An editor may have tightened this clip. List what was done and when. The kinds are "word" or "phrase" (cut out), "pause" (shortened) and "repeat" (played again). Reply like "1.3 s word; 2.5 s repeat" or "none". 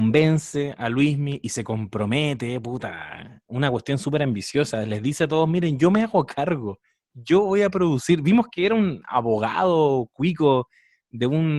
none